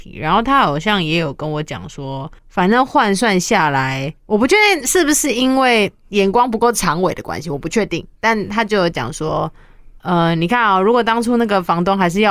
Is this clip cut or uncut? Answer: cut